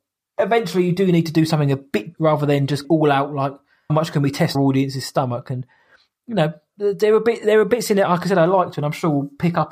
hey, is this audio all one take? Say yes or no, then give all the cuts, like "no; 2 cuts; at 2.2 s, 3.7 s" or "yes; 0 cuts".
no; 4 cuts; at 2.1 s, 2.8 s, 3.9 s, 4.5 s